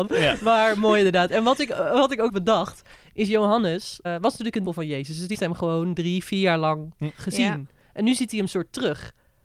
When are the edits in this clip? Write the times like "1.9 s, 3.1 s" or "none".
2.3 s, 4.0 s, 4.6 s, 5.3 s